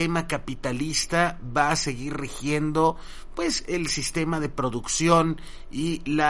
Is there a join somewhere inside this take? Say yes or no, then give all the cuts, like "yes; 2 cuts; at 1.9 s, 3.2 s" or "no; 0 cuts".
no; 0 cuts